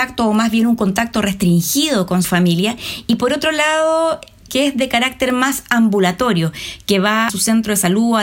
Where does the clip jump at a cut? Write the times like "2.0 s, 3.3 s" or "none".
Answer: 2.2 s, 4.5 s, 7.3 s